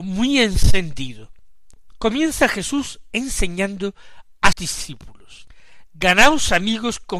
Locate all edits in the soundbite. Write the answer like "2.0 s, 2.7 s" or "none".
4.5 s